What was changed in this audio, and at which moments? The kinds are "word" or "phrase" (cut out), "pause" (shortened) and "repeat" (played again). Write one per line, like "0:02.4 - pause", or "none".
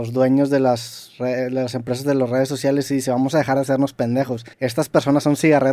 0:04.5 - pause